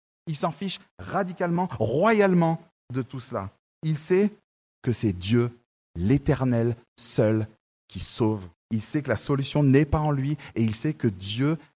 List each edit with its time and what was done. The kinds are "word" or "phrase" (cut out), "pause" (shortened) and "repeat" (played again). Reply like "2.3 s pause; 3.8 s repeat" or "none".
8.6 s pause